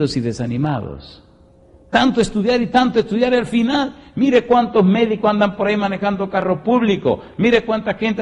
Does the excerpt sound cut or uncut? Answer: uncut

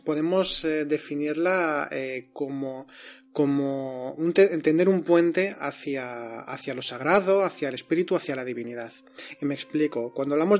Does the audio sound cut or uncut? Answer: uncut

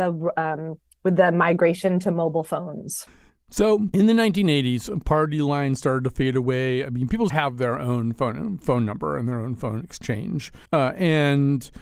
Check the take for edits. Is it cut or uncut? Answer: cut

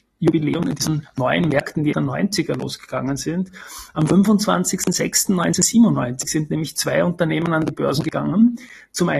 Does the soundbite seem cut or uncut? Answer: cut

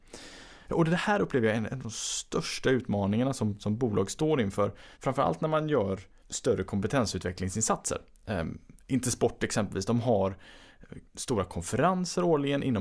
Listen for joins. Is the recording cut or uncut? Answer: cut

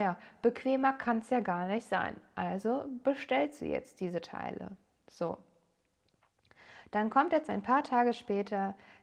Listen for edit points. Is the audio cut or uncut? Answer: uncut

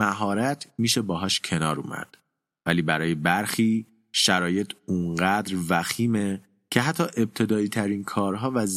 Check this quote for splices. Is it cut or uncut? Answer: uncut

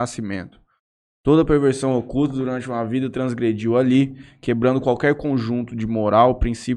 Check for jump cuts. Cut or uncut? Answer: uncut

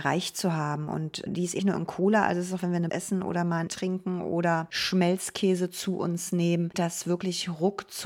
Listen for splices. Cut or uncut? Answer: cut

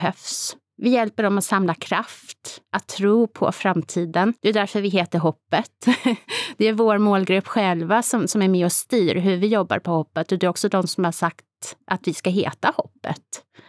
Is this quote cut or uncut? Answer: cut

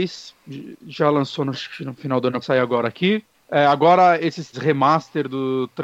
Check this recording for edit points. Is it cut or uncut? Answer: cut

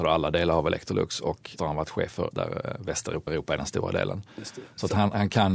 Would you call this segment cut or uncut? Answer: cut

